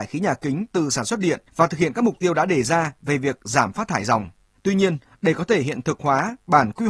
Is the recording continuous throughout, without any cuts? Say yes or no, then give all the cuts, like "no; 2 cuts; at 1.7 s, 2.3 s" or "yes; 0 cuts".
no; 2 cuts; at 1.5 s, 4.5 s